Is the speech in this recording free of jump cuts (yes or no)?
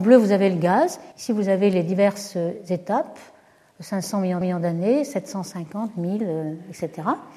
no